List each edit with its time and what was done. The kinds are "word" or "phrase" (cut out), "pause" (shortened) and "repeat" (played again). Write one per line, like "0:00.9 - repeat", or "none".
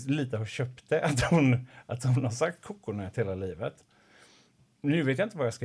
none